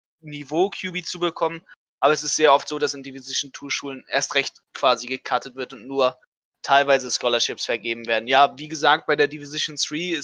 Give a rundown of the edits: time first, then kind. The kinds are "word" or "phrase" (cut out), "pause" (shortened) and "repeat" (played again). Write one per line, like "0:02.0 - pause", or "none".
none